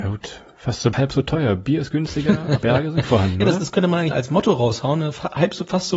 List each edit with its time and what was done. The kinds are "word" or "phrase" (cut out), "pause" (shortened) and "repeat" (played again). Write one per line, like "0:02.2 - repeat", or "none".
0:00.9 - word
0:02.6 - word
0:03.0 - word
0:04.1 - word